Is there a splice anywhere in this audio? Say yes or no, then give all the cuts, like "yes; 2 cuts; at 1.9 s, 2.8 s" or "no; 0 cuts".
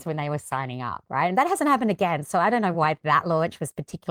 no; 0 cuts